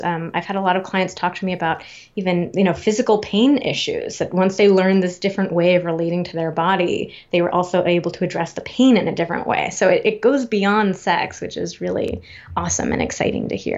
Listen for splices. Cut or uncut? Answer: uncut